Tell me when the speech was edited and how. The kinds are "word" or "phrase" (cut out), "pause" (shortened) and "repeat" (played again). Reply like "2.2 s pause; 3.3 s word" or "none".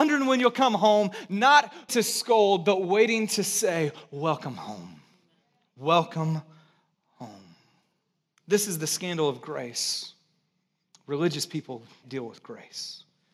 1.9 s word; 12.0 s word